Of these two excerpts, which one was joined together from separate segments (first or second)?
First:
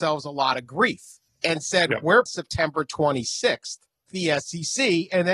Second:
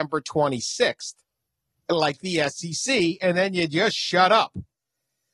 first